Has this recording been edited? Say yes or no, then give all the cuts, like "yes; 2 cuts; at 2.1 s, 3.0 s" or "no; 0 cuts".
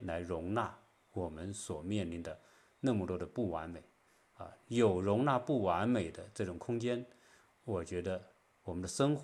no; 0 cuts